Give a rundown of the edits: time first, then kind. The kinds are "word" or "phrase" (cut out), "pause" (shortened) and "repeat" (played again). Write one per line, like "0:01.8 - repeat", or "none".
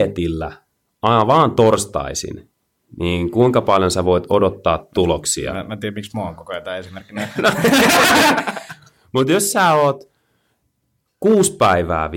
none